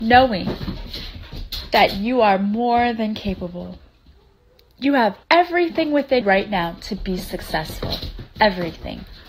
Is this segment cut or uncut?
cut